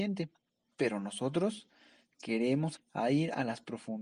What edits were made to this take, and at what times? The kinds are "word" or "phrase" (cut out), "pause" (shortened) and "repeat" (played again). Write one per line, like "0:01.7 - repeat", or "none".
0:02.8 - word